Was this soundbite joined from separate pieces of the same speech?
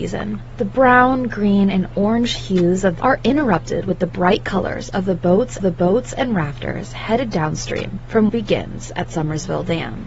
yes; 3 cuts; at 3.0 s, 5.6 s, 8.3 s

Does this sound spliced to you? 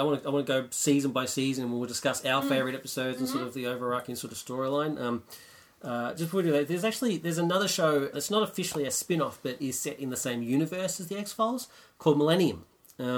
yes; 1 cut; at 8.1 s

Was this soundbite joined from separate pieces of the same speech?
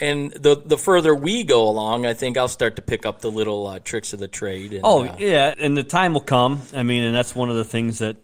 yes; 1 cut; at 5.5 s

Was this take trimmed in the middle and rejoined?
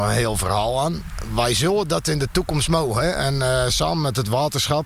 no; 0 cuts

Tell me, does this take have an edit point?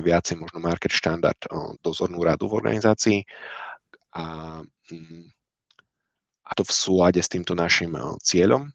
yes; 2 cuts; at 1.8 s, 6.5 s

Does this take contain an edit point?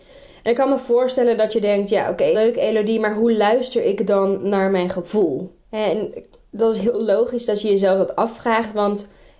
yes; 2 cuts; at 2.3 s, 5.6 s

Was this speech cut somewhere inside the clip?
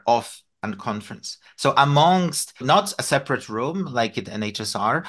yes; 1 cut; at 2.6 s

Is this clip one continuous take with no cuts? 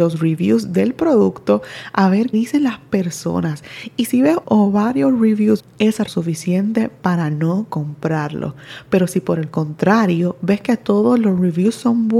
no; 4 cuts; at 2.3 s, 4.4 s, 5.6 s, 6.1 s

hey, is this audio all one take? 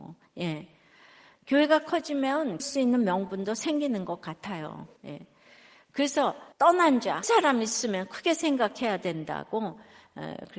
no; 4 cuts; at 2.6 s, 5.0 s, 6.5 s, 7.2 s

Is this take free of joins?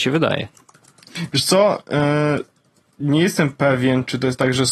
yes; 0 cuts

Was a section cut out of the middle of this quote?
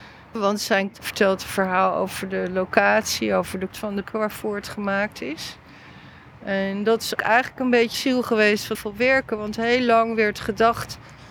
yes; 6 cuts; at 0.9 s, 3.7 s, 4.0 s, 7.2 s, 7.9 s, 8.7 s

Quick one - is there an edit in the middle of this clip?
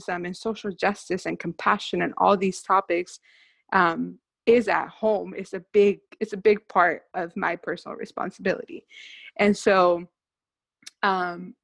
no; 0 cuts

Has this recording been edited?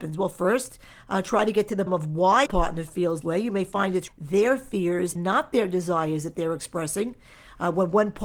yes; 5 cuts; at 1.9 s, 2.5 s, 3.2 s, 4.1 s, 5.1 s

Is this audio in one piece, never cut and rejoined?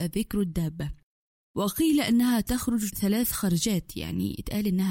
yes; 0 cuts

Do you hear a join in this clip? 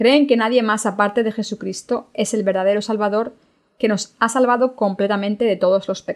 no; 0 cuts

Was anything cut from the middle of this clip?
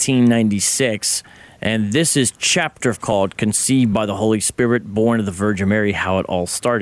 yes; 1 cut; at 2.9 s

